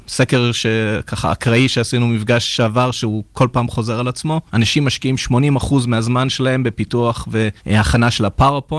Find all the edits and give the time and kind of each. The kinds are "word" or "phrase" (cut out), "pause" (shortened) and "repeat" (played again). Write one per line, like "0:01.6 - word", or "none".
0:04.5 - pause
0:07.6 - pause

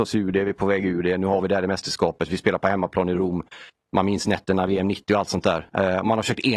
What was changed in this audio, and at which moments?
none

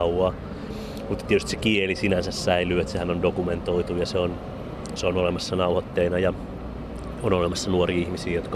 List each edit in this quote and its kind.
none

